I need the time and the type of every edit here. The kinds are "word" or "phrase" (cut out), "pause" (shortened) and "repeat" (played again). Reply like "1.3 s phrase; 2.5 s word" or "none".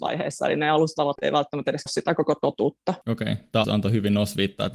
1.2 s word; 1.9 s word; 3.0 s pause; 3.6 s word